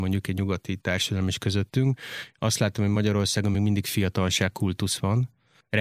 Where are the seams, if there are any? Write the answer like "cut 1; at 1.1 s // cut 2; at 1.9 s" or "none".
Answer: none

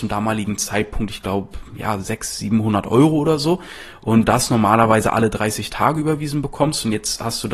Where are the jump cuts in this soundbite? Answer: cut 1; at 4.2 s

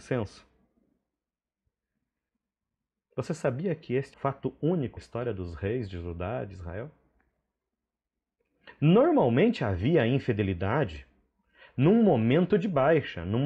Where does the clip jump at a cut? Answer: cut 1; at 4.1 s // cut 2; at 5.0 s

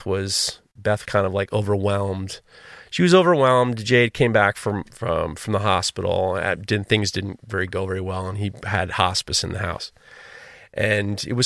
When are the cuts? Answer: cut 1; at 1.0 s

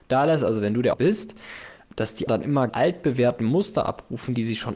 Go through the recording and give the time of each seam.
cut 1; at 0.9 s // cut 2; at 2.3 s // cut 3; at 2.7 s

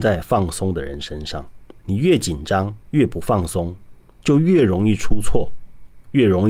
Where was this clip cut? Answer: cut 1; at 1.8 s // cut 2; at 2.8 s

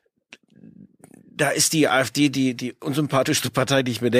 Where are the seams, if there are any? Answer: none

